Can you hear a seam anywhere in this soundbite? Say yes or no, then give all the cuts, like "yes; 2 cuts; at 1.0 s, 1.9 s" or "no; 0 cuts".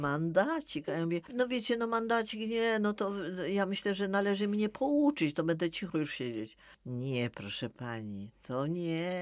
yes; 1 cut; at 1.3 s